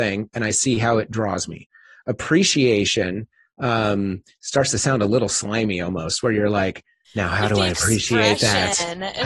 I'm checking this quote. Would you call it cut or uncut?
uncut